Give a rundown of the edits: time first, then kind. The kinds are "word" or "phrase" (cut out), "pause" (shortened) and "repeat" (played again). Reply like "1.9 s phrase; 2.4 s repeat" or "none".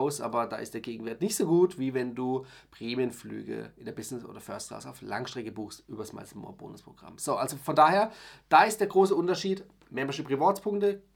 none